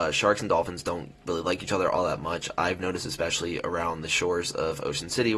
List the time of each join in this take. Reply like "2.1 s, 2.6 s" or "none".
1.2 s